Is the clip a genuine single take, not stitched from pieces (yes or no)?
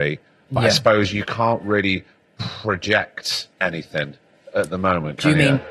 no